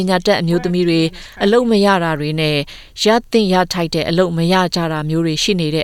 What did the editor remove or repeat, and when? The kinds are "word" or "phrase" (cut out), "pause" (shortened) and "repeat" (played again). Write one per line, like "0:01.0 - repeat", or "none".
none